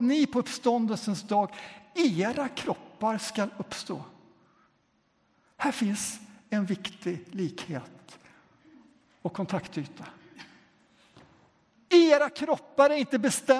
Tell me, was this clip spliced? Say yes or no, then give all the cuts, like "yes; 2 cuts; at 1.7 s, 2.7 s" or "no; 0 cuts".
no; 0 cuts